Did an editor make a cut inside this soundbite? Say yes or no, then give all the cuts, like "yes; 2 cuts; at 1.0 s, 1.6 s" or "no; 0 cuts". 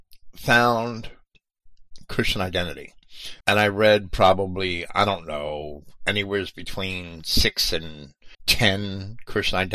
yes; 2 cuts; at 3.4 s, 8.3 s